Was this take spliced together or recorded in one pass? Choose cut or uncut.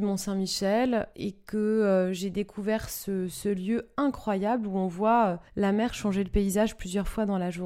cut